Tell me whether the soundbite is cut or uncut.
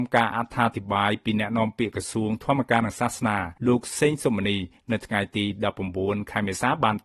cut